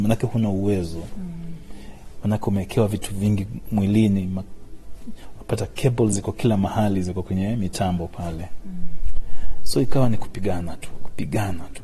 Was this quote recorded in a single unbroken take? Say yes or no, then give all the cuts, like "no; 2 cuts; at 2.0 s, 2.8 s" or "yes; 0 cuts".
yes; 0 cuts